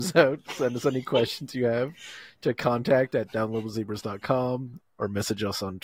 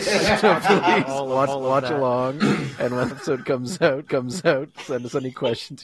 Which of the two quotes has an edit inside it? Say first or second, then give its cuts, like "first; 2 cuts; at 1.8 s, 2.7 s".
second; 3 cuts; at 1.5 s, 3.1 s, 4.1 s